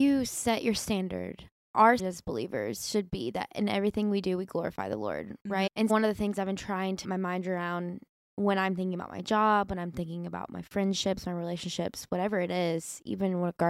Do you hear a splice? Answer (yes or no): yes